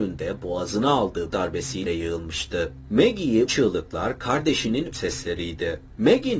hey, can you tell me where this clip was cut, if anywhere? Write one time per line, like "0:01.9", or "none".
0:01.3
0:01.9
0:03.5
0:04.9